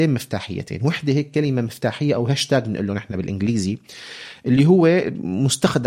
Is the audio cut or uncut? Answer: uncut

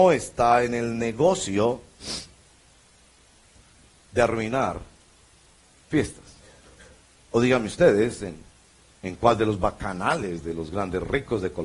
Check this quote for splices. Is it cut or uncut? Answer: uncut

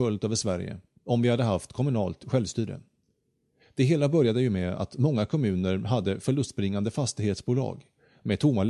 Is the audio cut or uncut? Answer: uncut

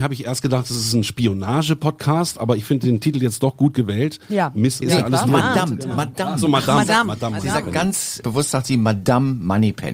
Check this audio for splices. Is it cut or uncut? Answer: cut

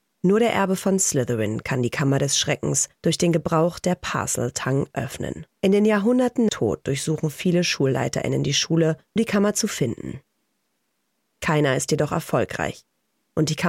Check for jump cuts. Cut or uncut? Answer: cut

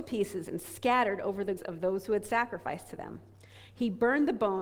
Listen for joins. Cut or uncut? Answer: cut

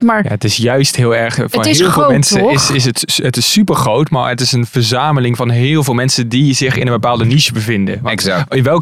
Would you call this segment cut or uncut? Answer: uncut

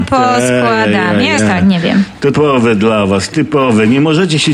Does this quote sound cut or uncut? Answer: cut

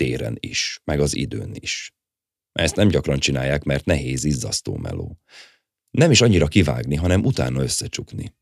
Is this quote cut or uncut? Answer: uncut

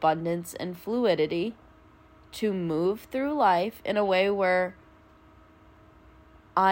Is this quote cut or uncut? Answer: uncut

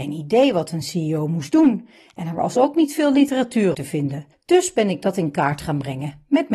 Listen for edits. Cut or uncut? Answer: cut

